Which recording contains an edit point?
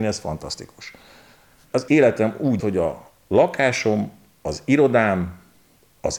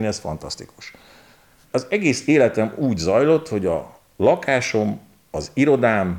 first; 2 cuts; at 1.9 s, 2.6 s

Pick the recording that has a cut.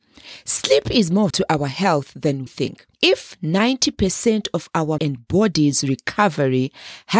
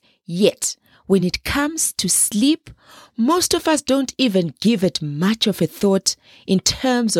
first; 4 cuts; at 1.3 s, 2.5 s, 2.9 s, 5.0 s

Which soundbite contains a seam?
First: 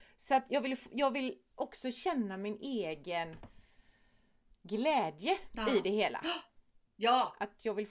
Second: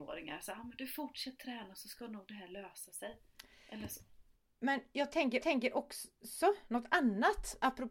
second; 2 cuts; at 4.3 s, 5.4 s

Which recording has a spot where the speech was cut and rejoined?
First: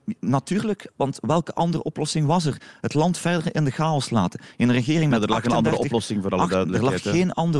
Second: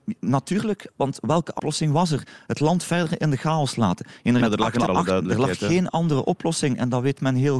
second; 3 cuts; at 1.6 s, 4.4 s, 4.9 s

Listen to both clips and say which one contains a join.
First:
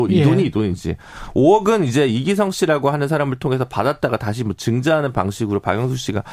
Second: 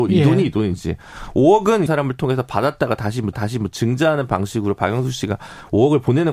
second; 2 cuts; at 1.9 s, 3.3 s

